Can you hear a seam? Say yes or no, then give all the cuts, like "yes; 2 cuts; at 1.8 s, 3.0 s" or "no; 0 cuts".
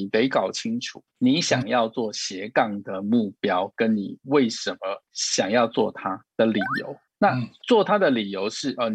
yes; 2 cuts; at 5.0 s, 7.1 s